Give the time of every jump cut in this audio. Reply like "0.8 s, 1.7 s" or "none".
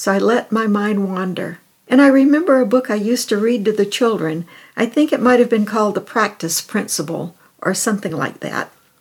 none